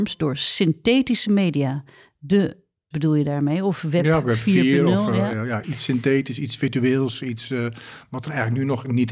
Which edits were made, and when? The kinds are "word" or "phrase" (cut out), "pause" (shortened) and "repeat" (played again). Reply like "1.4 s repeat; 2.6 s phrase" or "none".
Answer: 2.9 s word; 5.6 s word